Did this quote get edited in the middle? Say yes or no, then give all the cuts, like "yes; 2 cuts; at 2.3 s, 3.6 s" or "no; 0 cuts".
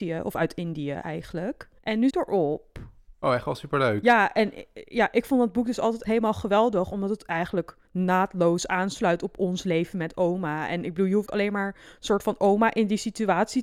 yes; 5 cuts; at 1.8 s, 2.1 s, 6.0 s, 7.8 s, 11.3 s